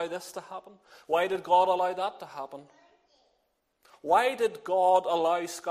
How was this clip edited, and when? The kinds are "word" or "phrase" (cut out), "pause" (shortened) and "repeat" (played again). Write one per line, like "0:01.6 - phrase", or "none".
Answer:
none